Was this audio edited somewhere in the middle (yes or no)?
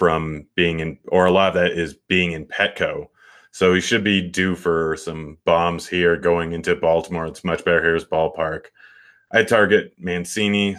no